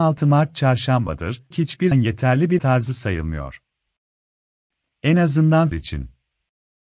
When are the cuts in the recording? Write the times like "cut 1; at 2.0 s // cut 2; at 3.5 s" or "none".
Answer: cut 1; at 1.5 s // cut 2; at 1.9 s // cut 3; at 2.6 s // cut 4; at 5.7 s